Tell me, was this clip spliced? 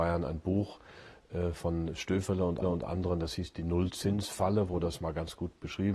yes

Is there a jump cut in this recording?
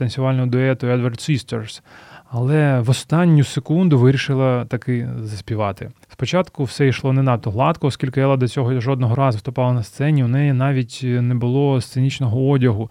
yes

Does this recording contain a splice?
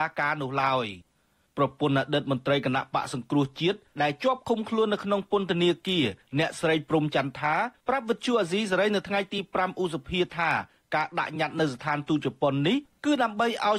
no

